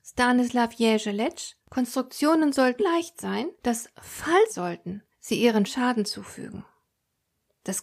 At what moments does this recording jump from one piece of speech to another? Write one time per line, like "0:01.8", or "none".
0:01.6
0:02.8
0:03.5
0:04.5
0:05.1
0:05.7